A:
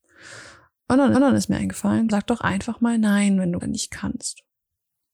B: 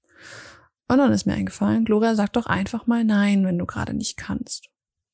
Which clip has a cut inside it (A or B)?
A